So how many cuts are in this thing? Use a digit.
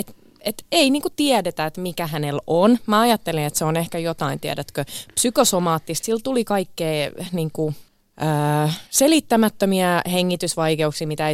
1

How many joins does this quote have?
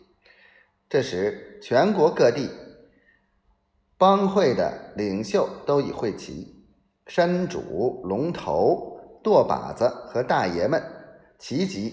0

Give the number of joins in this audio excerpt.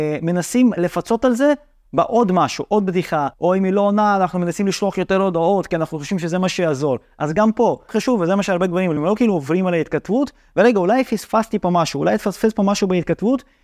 3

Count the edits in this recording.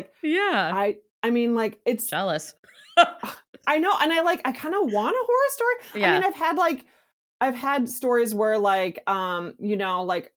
0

